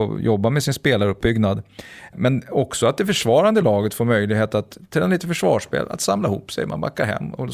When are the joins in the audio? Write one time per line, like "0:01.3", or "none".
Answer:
none